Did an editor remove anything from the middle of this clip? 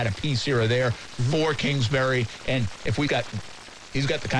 yes; 1 cut; at 3.1 s

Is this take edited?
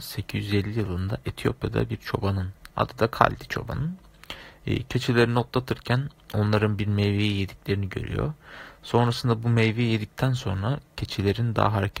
no; 0 cuts

